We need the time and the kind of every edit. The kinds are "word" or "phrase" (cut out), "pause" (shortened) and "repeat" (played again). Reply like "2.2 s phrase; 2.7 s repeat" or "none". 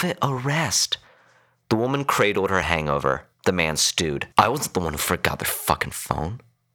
2.6 s phrase; 4.3 s pause